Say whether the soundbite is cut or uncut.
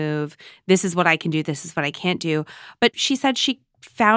uncut